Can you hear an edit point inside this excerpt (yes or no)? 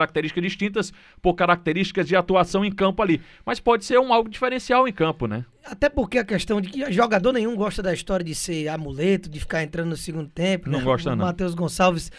no